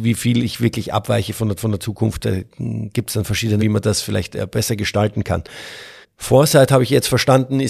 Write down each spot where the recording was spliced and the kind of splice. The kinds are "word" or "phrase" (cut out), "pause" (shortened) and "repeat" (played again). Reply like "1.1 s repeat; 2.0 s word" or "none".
1.6 s repeat; 3.6 s word; 6.0 s pause